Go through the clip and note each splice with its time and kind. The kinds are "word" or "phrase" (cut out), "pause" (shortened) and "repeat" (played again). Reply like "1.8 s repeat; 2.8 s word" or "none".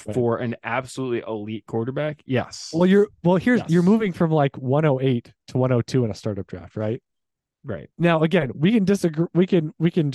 7.9 s pause